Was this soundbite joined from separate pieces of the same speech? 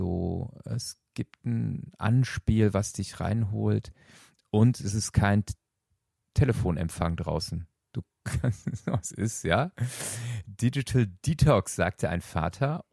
no; 0 cuts

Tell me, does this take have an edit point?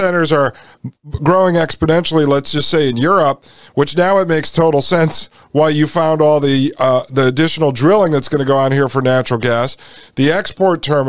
no; 0 cuts

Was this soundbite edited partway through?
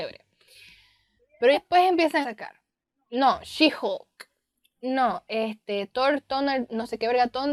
yes; 3 cuts; at 1.5 s, 2.2 s, 5.9 s

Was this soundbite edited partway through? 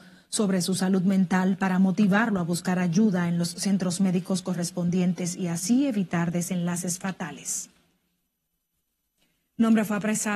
no; 0 cuts

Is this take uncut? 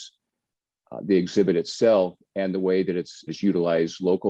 no; 1 cut; at 3.3 s

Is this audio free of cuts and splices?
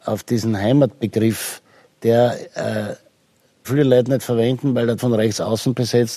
no; 3 cuts; at 1.9 s, 3.6 s, 5.0 s

